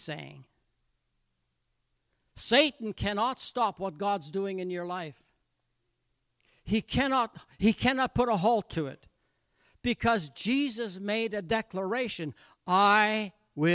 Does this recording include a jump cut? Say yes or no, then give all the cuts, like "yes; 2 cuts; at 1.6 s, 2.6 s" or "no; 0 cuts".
no; 0 cuts